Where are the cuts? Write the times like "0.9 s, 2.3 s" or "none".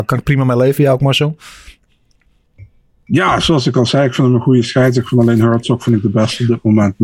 none